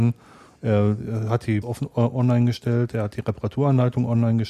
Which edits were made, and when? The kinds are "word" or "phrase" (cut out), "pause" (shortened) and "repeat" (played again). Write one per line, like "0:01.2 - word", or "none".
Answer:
0:01.6 - phrase